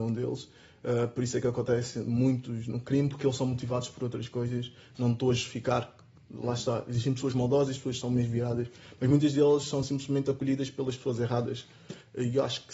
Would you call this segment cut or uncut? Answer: uncut